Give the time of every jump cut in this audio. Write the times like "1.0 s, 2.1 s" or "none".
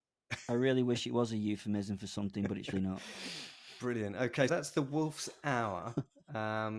2.7 s, 4.5 s